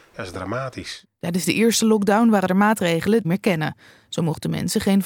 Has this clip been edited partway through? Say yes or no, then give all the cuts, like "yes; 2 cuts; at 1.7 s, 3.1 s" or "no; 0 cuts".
yes; 1 cut; at 3.2 s